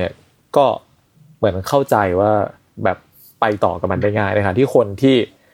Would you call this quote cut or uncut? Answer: uncut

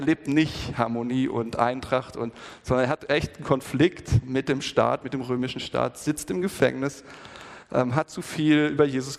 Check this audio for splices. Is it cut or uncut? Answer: cut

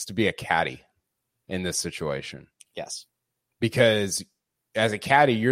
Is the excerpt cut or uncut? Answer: uncut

